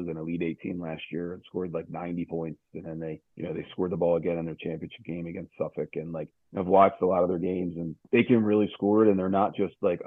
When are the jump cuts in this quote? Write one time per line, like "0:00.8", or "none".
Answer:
0:03.3